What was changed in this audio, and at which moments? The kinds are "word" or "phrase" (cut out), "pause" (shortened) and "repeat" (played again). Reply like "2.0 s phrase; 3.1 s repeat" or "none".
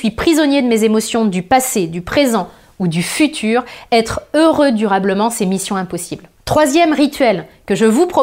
none